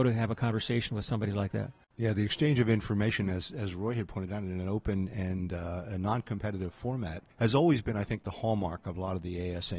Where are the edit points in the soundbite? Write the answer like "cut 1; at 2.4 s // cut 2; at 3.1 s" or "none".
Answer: cut 1; at 7.3 s